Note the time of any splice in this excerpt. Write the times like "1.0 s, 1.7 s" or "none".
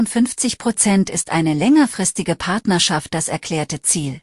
none

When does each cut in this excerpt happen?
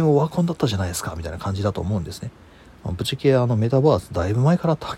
none

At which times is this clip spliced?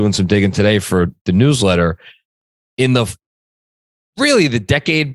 none

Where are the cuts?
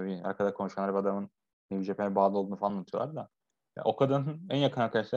none

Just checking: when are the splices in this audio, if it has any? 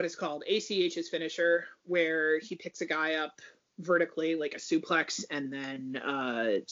none

